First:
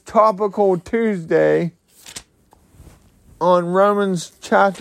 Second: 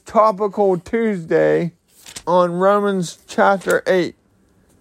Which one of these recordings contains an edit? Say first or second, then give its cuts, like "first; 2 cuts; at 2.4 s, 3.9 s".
second; 1 cut; at 2.2 s